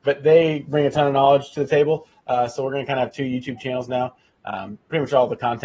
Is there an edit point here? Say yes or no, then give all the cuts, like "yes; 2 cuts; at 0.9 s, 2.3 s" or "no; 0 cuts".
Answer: no; 0 cuts